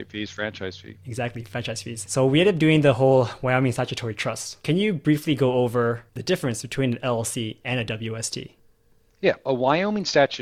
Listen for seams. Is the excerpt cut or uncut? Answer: uncut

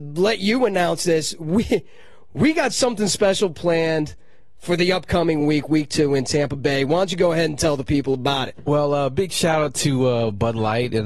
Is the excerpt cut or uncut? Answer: uncut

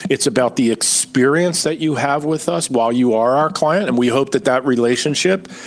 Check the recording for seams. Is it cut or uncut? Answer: uncut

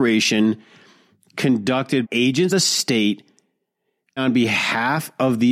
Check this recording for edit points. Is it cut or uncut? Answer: cut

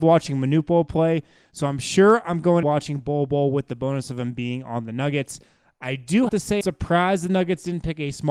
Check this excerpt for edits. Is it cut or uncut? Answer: cut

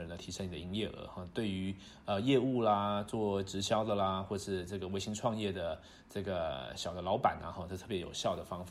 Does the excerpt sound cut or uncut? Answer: uncut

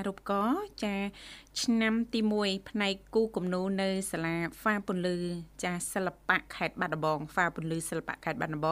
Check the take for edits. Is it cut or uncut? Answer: cut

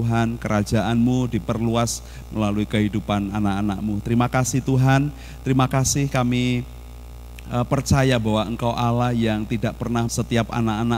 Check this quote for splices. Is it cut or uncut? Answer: cut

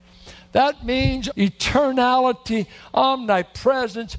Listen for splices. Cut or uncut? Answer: cut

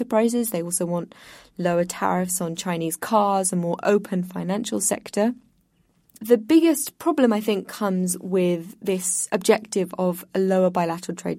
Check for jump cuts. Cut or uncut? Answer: uncut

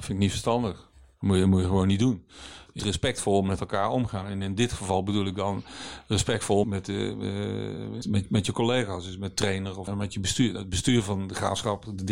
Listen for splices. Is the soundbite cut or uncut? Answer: cut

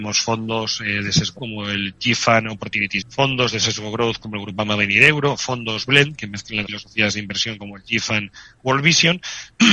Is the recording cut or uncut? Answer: cut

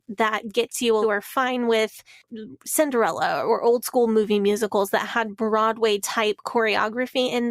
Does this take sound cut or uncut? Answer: cut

